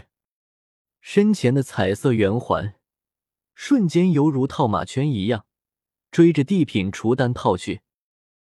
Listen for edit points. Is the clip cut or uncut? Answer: uncut